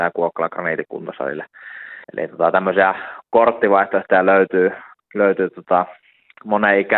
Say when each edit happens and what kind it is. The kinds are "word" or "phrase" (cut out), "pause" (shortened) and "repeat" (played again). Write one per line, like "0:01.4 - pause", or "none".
0:02.0 - pause